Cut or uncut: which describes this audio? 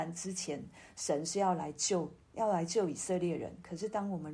cut